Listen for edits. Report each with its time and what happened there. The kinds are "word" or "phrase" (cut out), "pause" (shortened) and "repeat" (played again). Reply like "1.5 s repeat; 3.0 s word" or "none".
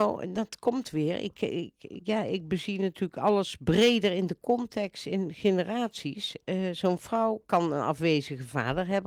none